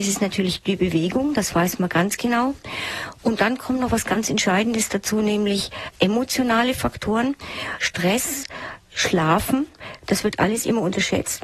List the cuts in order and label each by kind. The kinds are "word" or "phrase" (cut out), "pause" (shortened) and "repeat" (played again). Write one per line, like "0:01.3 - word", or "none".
none